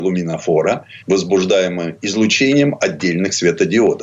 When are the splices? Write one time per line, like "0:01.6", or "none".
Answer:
0:01.0